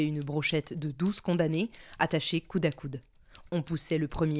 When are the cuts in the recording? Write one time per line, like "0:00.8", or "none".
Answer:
none